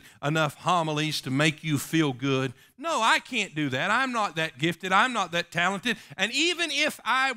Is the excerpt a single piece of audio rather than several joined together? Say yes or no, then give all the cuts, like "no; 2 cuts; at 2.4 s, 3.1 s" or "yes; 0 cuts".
yes; 0 cuts